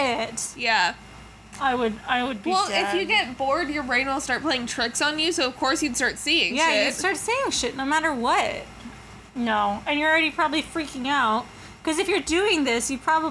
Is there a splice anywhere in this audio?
yes; 1 cut; at 9.3 s

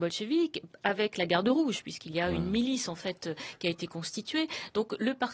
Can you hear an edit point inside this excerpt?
no; 0 cuts

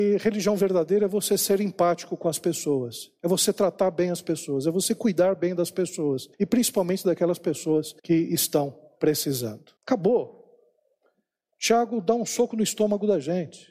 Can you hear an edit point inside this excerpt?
yes; 3 cuts; at 6.3 s, 8.0 s, 9.8 s

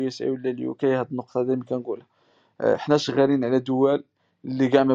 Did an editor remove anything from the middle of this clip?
no; 0 cuts

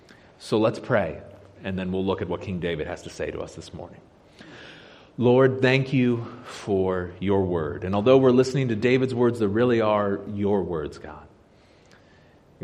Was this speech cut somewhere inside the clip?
no; 0 cuts

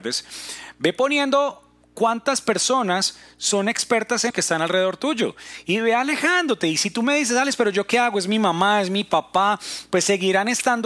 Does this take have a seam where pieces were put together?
yes; 2 cuts; at 1.8 s, 4.3 s

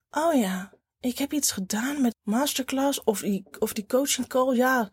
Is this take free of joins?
no; 1 cut; at 2.1 s

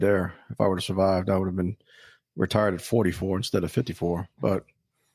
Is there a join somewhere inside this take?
no; 0 cuts

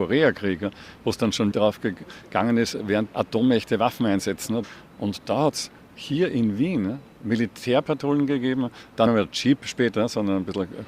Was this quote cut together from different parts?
yes; 3 cuts; at 1.5 s, 3.1 s, 9.1 s

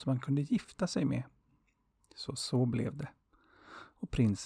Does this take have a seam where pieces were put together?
no; 0 cuts

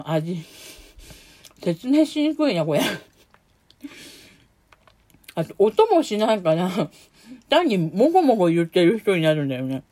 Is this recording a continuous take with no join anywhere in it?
yes; 0 cuts

